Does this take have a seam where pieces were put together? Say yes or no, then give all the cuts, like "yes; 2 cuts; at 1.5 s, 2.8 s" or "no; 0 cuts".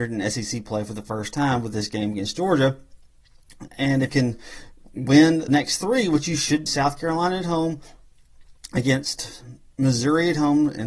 yes; 3 cuts; at 4.1 s, 5.5 s, 6.7 s